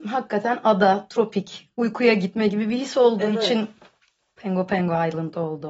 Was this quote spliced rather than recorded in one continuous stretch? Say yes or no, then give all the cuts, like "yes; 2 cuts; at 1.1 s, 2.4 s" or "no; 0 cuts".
no; 0 cuts